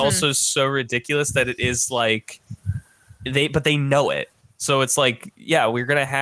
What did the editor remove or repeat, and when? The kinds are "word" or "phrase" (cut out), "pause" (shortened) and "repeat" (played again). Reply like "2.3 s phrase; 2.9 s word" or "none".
none